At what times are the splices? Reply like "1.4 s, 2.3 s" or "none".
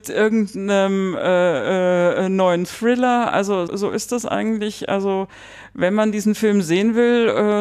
3.7 s